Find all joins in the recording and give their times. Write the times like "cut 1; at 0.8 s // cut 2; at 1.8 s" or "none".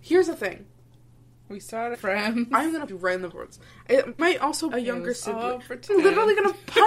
cut 1; at 1.9 s // cut 2; at 2.9 s // cut 3; at 3.3 s // cut 4; at 4.2 s // cut 5; at 4.7 s // cut 6; at 5.9 s